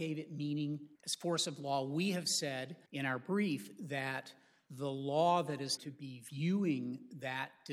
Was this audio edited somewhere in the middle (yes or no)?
yes